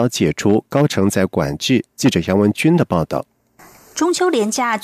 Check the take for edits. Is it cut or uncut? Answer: uncut